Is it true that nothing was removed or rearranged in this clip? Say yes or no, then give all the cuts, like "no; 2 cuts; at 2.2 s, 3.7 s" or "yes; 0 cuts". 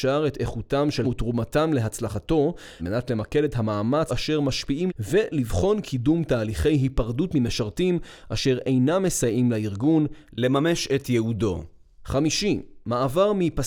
no; 4 cuts; at 1.0 s, 2.8 s, 4.1 s, 4.9 s